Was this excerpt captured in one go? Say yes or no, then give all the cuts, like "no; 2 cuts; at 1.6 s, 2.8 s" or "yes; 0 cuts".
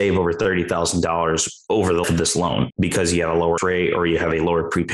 no; 2 cuts; at 2.0 s, 3.6 s